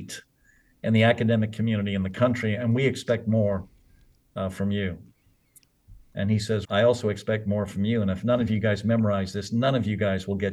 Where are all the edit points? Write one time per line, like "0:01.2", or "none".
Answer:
0:06.6

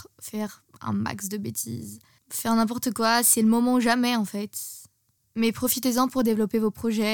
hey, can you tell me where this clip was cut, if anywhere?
none

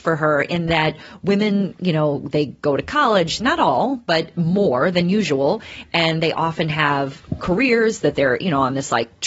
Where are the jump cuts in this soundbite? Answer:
0:03.4

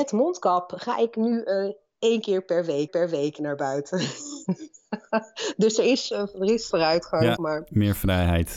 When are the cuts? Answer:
0:02.9
0:06.7
0:07.4

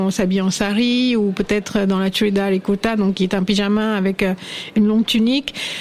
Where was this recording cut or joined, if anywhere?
none

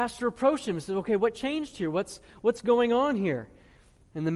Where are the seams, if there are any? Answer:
none

